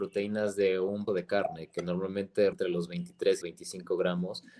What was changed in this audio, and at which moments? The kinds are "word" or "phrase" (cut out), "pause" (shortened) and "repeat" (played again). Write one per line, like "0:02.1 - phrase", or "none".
0:01.1 - word
0:02.5 - word
0:03.4 - phrase